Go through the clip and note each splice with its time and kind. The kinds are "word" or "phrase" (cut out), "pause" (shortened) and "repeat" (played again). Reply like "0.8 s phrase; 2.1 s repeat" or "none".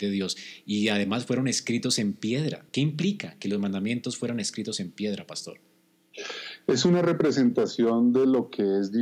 2.7 s pause